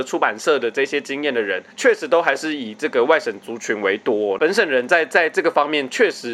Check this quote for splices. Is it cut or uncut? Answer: cut